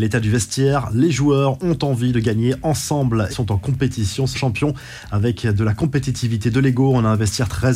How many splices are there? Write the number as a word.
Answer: two